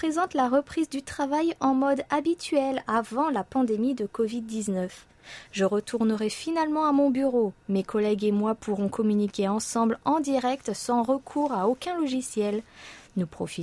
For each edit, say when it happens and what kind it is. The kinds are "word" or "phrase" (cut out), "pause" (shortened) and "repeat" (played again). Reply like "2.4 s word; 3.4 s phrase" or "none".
none